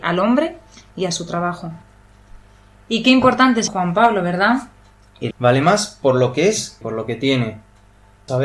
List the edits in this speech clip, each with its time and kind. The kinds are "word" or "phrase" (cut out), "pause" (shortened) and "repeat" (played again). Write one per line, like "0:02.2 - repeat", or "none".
0:03.7 - word
0:05.3 - word
0:06.8 - word